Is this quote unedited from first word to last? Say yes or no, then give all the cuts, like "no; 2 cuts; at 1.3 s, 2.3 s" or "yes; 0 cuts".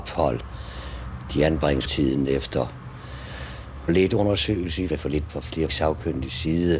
no; 5 cuts; at 1.9 s, 3.9 s, 4.9 s, 5.3 s, 5.7 s